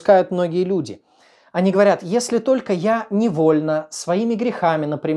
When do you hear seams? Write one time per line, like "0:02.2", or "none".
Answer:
none